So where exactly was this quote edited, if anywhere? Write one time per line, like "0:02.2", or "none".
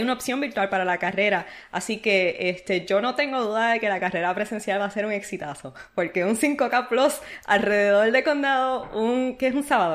none